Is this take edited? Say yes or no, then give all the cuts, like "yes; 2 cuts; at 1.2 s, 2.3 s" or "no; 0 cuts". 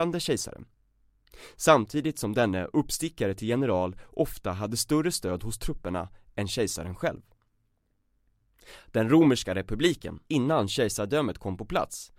yes; 1 cut; at 10.3 s